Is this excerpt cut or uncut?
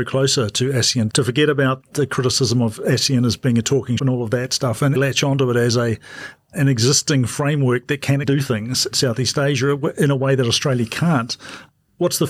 cut